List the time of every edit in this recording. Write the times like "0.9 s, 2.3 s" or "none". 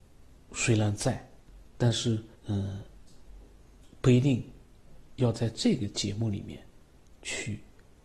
2.3 s